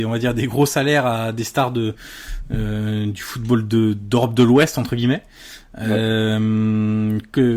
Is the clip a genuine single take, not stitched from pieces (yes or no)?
yes